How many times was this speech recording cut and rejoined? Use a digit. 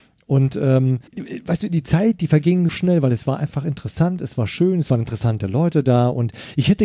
2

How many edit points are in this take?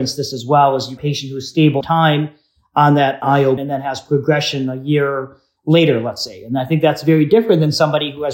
3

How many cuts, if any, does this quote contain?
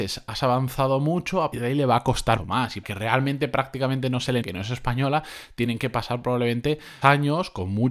5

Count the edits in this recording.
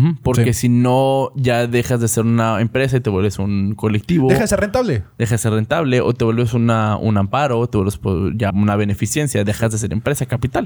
1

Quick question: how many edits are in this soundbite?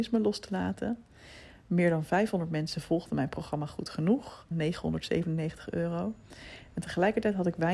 1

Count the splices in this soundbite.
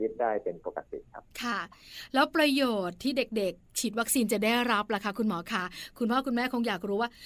1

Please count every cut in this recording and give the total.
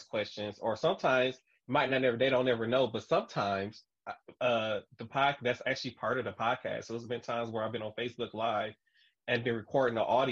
0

